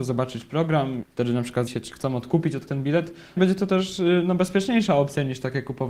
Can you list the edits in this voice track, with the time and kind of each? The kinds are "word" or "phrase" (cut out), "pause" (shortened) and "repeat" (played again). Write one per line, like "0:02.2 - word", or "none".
0:01.0 - word
0:01.7 - word
0:02.7 - word
0:03.4 - word